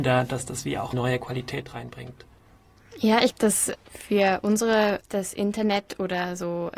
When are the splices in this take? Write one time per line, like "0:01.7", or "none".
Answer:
0:00.9
0:03.3
0:03.8
0:05.0